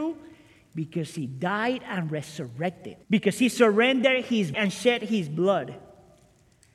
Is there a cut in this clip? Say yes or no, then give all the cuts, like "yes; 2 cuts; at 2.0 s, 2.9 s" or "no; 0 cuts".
yes; 2 cuts; at 3.0 s, 4.5 s